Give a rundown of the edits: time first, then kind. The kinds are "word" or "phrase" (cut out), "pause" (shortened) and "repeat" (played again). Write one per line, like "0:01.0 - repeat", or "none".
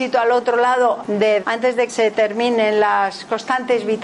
0:01.0 - word
0:01.4 - word
0:01.9 - word